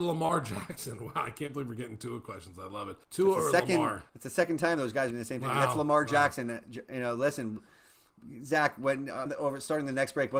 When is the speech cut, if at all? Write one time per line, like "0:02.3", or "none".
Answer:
0:03.0
0:04.1
0:05.1
0:09.3